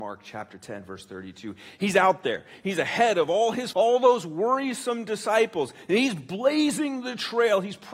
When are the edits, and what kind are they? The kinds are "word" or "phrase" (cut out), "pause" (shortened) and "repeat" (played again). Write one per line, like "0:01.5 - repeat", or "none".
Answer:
0:03.7 - word